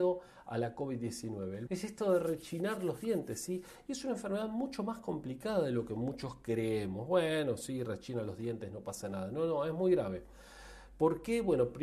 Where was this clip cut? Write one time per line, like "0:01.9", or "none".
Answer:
0:01.7